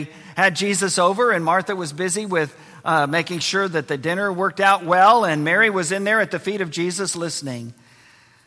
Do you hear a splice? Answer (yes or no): no